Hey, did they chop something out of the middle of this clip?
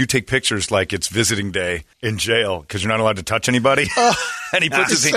yes; 1 cut; at 1.9 s

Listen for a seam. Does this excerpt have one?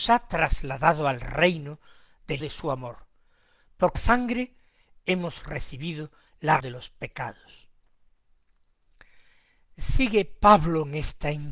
yes; 3 cuts; at 2.4 s, 3.9 s, 6.6 s

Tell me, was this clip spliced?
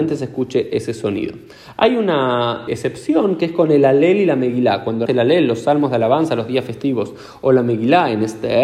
yes; 2 cuts; at 2.7 s, 5.1 s

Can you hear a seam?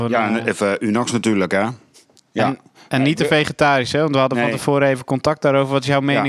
no; 0 cuts

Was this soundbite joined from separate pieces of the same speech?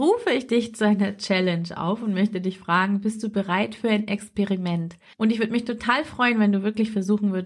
no; 0 cuts

